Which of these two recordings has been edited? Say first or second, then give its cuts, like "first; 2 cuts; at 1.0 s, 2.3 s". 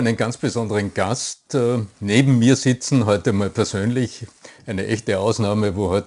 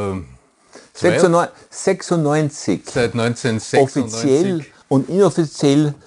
second; 1 cut; at 4.8 s